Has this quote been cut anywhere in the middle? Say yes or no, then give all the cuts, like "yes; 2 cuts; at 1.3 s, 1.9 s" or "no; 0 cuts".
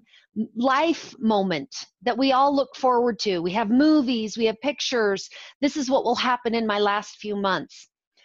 no; 0 cuts